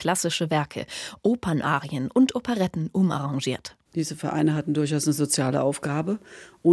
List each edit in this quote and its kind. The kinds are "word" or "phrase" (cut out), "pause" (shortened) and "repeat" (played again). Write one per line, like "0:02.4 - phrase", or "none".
0:03.8 - pause